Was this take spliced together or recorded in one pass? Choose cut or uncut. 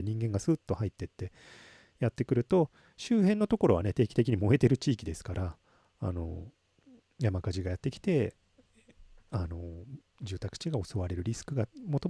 uncut